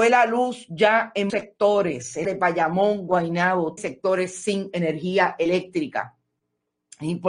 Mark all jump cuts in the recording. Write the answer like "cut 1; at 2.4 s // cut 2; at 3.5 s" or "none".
cut 1; at 1.3 s // cut 2; at 2.2 s // cut 3; at 3.8 s